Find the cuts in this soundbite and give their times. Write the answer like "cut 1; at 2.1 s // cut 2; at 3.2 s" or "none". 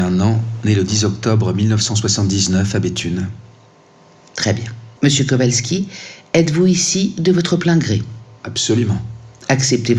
cut 1; at 5.0 s

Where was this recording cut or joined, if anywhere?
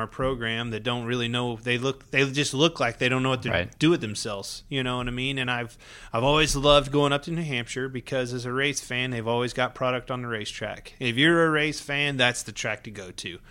none

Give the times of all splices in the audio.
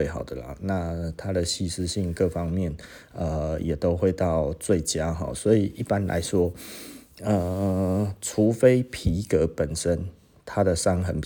none

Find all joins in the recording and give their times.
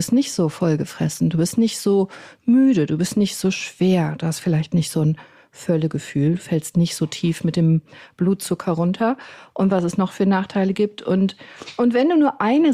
none

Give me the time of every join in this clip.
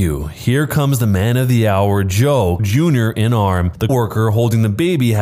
cut 1; at 2.6 s // cut 2; at 3.9 s

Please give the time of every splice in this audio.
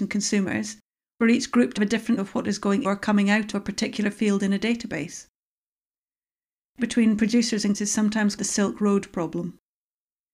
cut 1; at 1.2 s // cut 2; at 1.8 s // cut 3; at 2.2 s // cut 4; at 2.8 s // cut 5; at 3.5 s // cut 6; at 6.8 s // cut 7; at 7.7 s // cut 8; at 8.4 s

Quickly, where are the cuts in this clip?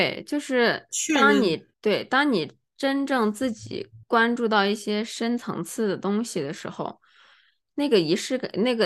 cut 1; at 1.7 s // cut 2; at 4.0 s

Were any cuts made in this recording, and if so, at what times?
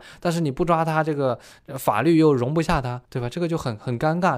cut 1; at 3.0 s

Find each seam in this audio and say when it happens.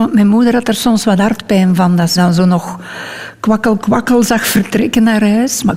cut 1; at 2.2 s

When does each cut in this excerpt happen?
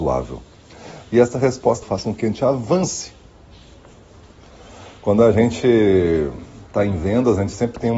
cut 1; at 1.8 s

